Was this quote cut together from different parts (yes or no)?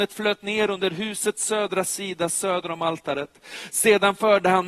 no